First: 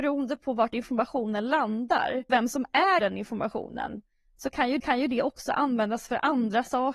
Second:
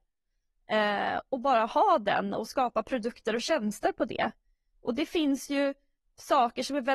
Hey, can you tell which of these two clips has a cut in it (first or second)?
first